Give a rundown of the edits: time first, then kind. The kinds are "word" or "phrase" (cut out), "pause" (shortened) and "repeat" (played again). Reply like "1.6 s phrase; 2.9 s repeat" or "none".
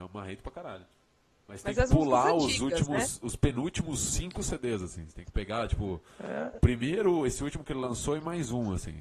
none